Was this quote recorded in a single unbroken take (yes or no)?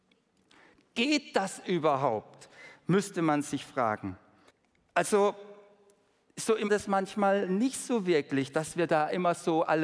no